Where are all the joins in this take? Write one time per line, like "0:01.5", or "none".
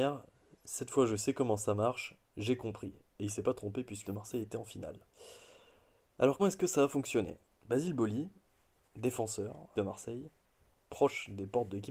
0:04.0
0:06.4
0:07.5
0:09.7